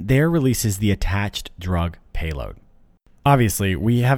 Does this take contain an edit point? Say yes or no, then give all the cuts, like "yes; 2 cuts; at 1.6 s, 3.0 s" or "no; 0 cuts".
no; 0 cuts